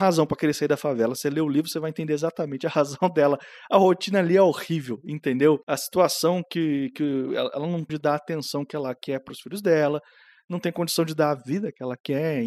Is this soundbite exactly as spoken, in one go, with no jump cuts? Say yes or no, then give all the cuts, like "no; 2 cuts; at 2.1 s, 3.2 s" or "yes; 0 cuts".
no; 2 cuts; at 5.6 s, 7.9 s